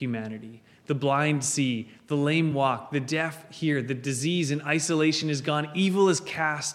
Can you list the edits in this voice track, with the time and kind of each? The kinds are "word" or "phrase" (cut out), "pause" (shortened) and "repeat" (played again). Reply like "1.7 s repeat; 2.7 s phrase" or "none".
none